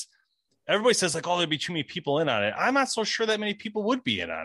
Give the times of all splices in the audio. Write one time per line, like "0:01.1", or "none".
none

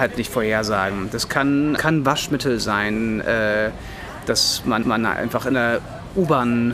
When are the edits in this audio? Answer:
0:01.8
0:04.8

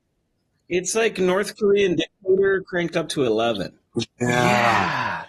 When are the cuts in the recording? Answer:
none

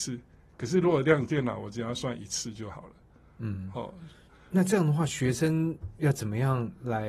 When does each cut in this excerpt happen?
none

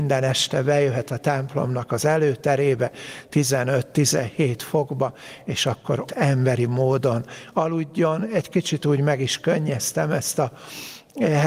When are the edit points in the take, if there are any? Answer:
0:06.0

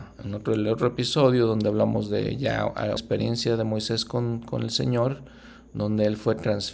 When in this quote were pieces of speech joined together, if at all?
0:03.0

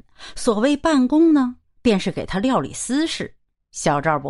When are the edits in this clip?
none

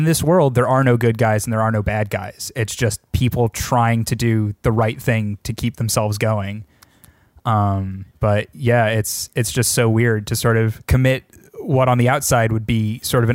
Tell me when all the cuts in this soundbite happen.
0:08.1
0:10.8

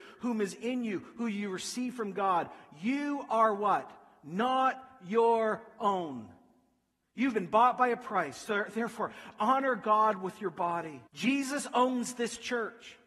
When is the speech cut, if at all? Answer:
0:11.1

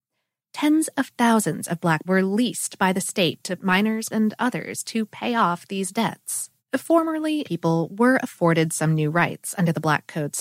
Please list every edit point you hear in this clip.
0:02.0
0:03.6
0:04.1
0:06.6
0:07.4

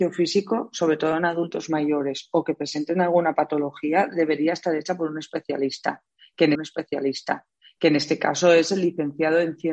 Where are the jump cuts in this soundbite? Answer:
0:06.5

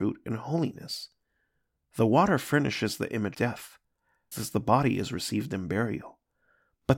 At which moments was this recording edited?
0:03.3
0:04.3

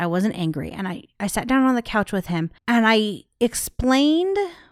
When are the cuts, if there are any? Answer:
0:02.6

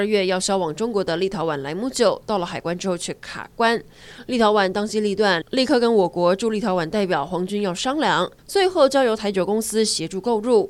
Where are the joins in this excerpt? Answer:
0:08.4

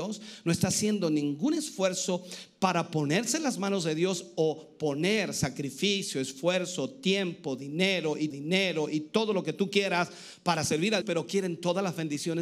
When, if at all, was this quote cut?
0:08.3
0:11.0

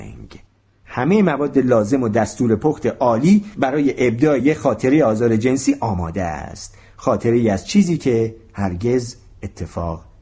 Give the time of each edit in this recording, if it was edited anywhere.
none

